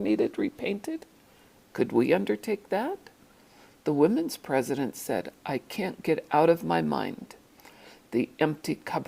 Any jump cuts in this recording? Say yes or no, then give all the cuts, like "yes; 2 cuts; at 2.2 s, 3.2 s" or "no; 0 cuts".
no; 0 cuts